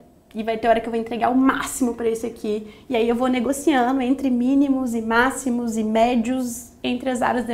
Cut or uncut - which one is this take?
uncut